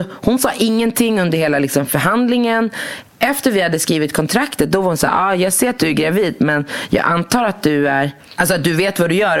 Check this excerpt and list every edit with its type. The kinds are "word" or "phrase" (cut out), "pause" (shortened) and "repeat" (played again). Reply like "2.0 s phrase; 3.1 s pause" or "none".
none